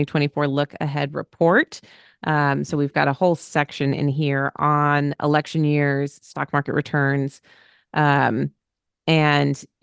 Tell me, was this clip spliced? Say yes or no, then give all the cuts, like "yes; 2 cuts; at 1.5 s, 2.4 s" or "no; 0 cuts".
no; 0 cuts